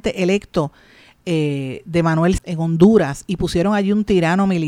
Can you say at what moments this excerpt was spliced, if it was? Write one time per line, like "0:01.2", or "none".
0:02.4